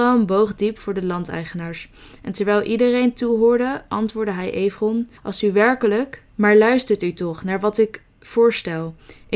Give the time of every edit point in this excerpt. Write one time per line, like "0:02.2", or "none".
0:05.2
0:06.3